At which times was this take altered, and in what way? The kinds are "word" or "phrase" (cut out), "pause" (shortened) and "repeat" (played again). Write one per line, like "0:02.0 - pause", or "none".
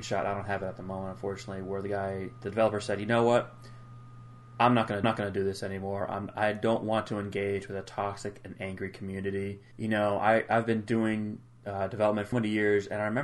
0:05.0 - repeat
0:09.7 - pause
0:12.3 - word